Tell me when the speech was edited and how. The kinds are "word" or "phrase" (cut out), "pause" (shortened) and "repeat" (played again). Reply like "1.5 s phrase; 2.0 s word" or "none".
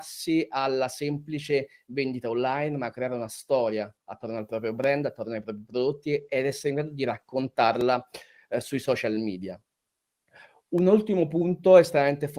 none